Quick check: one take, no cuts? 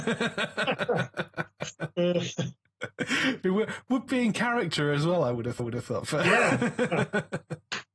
no; 2 cuts; at 4.1 s, 5.6 s

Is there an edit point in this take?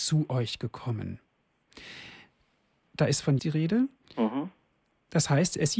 yes; 1 cut; at 3.4 s

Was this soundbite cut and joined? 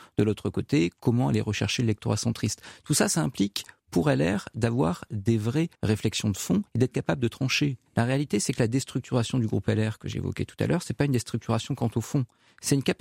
yes; 3 cuts; at 5.7 s, 6.7 s, 7.9 s

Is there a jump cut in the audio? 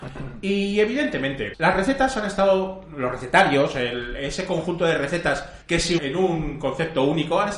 yes; 3 cuts; at 1.5 s, 5.6 s, 6.0 s

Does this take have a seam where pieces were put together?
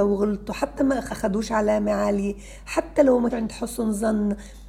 yes; 2 cuts; at 1.1 s, 3.3 s

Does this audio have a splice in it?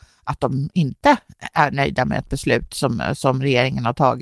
no; 0 cuts

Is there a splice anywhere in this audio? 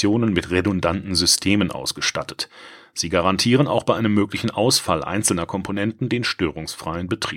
no; 0 cuts

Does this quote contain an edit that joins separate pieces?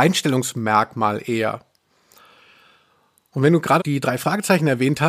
yes; 1 cut; at 3.8 s

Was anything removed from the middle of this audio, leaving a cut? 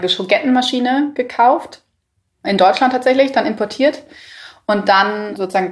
no; 0 cuts

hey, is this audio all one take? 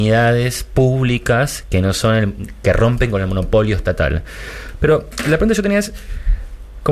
yes; 0 cuts

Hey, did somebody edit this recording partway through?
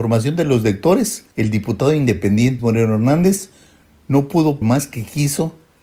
yes; 3 cuts; at 1.3 s, 2.6 s, 4.6 s

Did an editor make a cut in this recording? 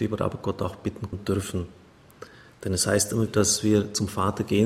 yes; 2 cuts; at 1.1 s, 3.3 s

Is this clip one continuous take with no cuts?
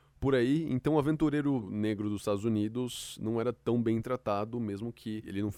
yes; 0 cuts

